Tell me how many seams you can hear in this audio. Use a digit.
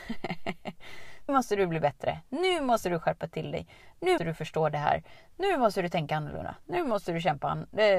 2